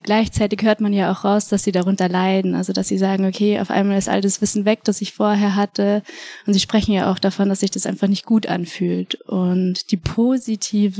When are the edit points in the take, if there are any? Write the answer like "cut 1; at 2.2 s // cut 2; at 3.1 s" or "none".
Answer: none